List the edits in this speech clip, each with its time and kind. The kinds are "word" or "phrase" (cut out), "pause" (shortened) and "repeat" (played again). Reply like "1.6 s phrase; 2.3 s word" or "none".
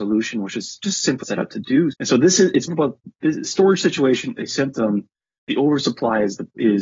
1.2 s word; 1.9 s word; 2.7 s word; 3.4 s word; 4.4 s word